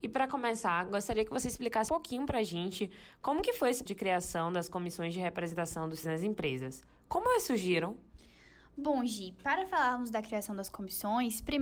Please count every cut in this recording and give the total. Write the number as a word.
three